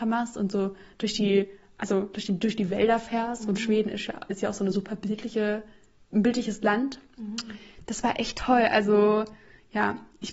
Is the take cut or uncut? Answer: uncut